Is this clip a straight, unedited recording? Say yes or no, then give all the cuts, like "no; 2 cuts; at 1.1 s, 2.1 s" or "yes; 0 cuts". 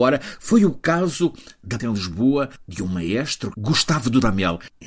no; 2 cuts; at 1.8 s, 3.5 s